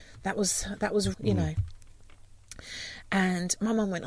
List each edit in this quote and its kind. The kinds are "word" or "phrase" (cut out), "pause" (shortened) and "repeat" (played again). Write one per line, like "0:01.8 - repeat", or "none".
0:01.1 - word